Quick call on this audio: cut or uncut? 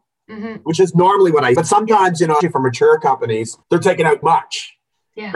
cut